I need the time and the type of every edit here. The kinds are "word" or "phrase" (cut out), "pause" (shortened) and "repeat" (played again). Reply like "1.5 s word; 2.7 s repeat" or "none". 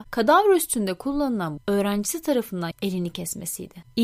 1.6 s word; 2.7 s word